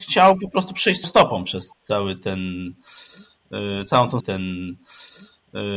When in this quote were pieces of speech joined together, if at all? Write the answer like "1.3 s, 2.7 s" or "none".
1.0 s, 1.7 s, 4.2 s